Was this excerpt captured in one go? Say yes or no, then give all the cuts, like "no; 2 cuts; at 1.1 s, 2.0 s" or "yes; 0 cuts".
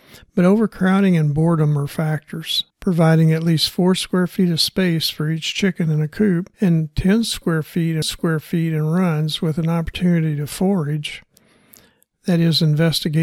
no; 3 cuts; at 2.7 s, 6.5 s, 8.0 s